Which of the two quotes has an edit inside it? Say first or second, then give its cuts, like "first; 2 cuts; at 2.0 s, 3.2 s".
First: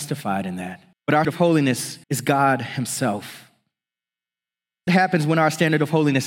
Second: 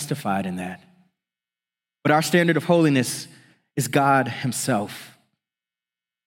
first; 4 cuts; at 0.9 s, 1.2 s, 2.0 s, 4.9 s